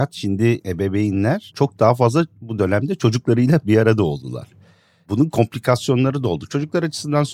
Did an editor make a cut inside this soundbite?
no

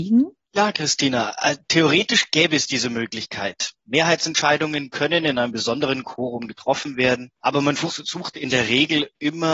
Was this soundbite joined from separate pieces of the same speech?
no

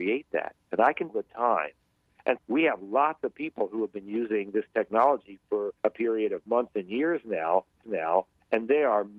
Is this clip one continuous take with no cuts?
no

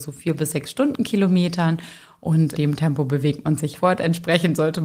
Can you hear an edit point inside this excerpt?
yes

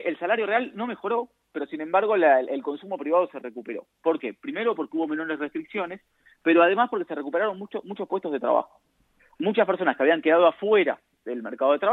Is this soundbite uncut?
yes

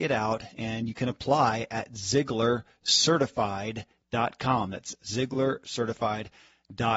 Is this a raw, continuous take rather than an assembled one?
yes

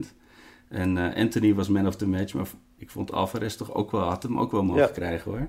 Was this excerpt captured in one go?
yes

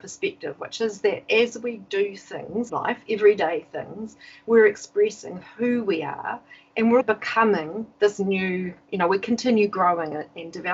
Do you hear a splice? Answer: yes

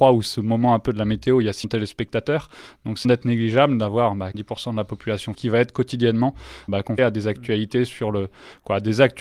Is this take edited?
yes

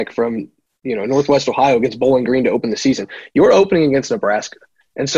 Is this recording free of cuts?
yes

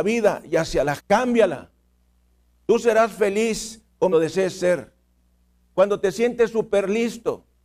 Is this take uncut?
no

